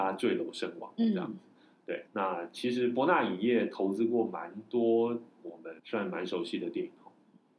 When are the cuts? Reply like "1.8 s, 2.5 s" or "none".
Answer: 2.1 s, 5.8 s